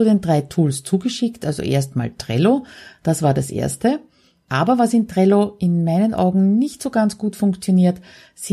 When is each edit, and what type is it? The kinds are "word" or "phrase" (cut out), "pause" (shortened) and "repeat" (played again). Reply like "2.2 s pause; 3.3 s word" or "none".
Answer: none